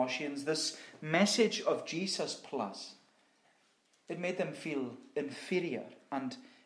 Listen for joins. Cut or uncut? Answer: uncut